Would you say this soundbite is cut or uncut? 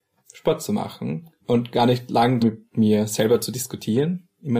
cut